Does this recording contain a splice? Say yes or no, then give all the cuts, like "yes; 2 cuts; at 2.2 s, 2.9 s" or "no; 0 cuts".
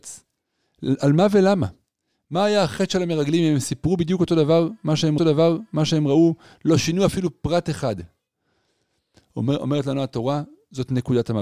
yes; 1 cut; at 5.2 s